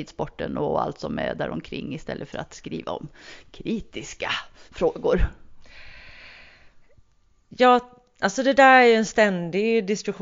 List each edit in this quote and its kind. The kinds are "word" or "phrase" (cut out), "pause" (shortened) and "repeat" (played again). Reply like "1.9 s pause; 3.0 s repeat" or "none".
none